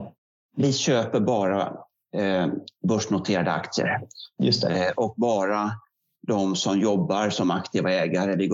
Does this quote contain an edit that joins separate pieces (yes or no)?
no